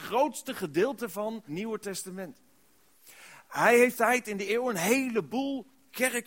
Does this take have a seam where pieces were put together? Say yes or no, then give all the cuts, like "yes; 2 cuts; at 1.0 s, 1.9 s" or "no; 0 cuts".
yes; 3 cuts; at 1.5 s, 3.9 s, 4.5 s